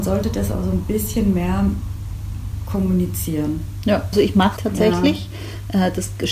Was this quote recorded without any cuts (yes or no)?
no